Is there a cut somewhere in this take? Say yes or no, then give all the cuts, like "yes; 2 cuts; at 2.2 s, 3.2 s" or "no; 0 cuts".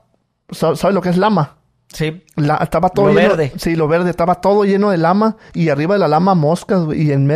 no; 0 cuts